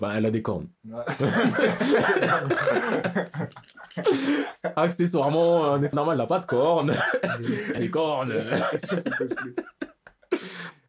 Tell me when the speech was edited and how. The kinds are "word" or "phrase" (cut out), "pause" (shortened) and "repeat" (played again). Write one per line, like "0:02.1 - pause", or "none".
0:05.9 - word
0:07.8 - word